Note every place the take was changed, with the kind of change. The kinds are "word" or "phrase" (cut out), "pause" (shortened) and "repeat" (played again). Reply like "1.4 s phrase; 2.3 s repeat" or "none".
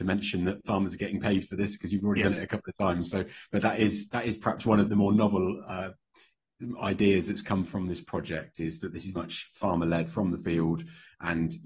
4.8 s word; 9.1 s word